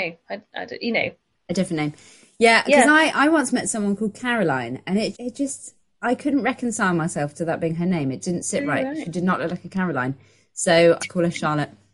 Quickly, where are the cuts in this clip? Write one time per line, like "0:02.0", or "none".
0:05.1
0:08.2
0:11.0

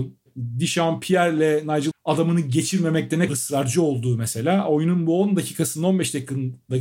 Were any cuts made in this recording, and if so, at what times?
0:01.9
0:03.3

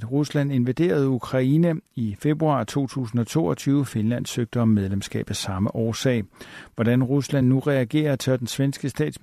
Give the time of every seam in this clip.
none

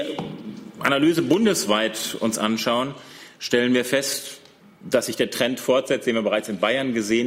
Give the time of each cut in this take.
none

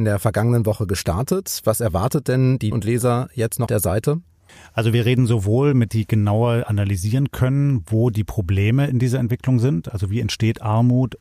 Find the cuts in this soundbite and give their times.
0:02.7
0:03.7
0:05.9

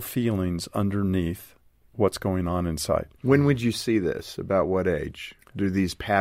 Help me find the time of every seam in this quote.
none

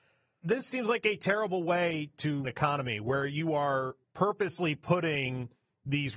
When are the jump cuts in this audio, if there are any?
0:02.4
0:04.0

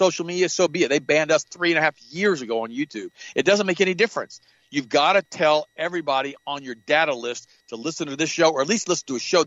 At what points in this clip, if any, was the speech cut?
none

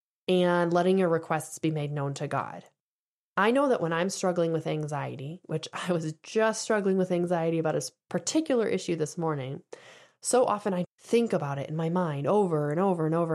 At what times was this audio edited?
0:10.8

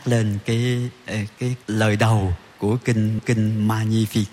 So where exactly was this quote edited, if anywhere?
0:01.6
0:03.2

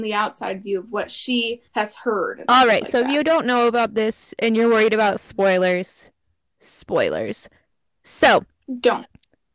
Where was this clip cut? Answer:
0:01.7

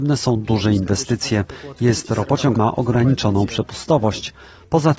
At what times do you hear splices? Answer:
0:02.6

